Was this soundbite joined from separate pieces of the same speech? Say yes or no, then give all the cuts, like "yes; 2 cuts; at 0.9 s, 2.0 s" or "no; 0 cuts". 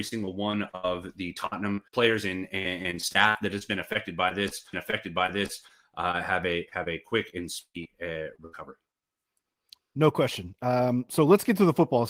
yes; 2 cuts; at 1.9 s, 4.7 s